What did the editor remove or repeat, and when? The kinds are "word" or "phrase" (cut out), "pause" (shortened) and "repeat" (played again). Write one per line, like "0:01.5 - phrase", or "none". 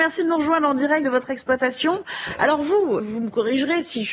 0:01.0 - word
0:03.0 - word